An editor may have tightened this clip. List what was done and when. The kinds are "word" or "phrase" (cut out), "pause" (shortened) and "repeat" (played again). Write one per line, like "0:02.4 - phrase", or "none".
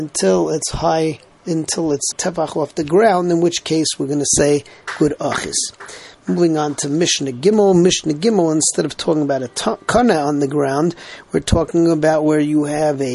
0:02.1 - word

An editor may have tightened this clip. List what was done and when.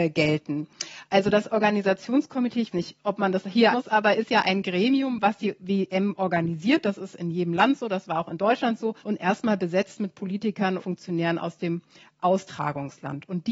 0:02.7 - word
0:03.7 - word
0:09.0 - pause
0:10.8 - word

